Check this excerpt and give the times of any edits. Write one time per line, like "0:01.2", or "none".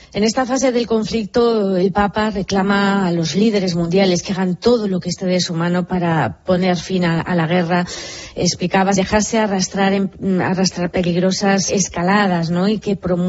0:09.0
0:10.9
0:11.7